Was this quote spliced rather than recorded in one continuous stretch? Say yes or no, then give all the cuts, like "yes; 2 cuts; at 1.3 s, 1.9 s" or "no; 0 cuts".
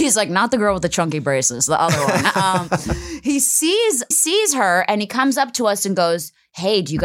yes; 1 cut; at 4.1 s